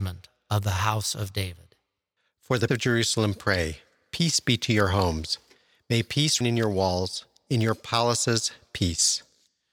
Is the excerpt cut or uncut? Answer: cut